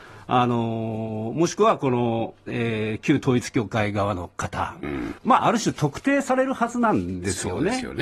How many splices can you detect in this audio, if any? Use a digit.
1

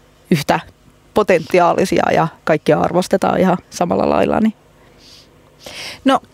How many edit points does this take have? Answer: 2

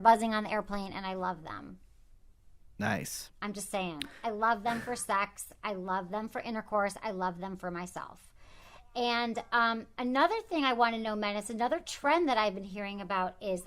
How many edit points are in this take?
1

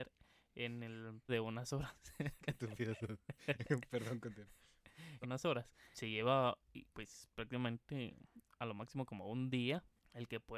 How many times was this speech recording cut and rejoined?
4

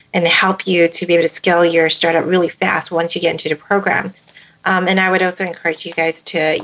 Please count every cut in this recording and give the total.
0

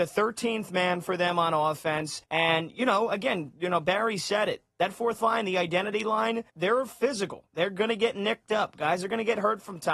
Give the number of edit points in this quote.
2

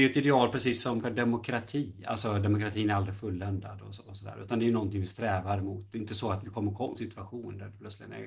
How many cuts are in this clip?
2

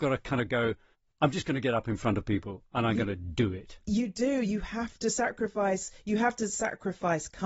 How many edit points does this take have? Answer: 1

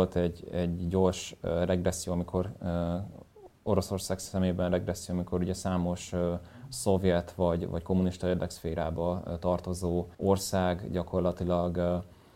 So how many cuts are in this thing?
1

